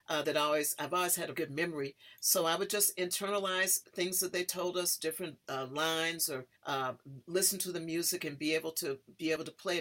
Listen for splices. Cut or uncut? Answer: cut